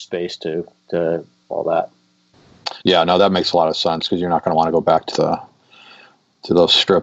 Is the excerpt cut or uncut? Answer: cut